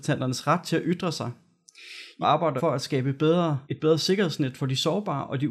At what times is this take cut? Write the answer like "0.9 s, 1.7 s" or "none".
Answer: 2.2 s, 2.6 s, 3.6 s